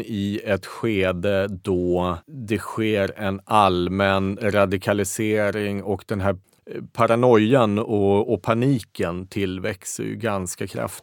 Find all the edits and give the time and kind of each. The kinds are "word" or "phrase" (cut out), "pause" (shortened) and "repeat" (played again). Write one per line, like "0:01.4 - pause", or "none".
0:02.2 - pause